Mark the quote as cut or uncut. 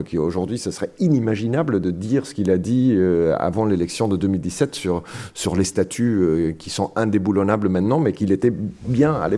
uncut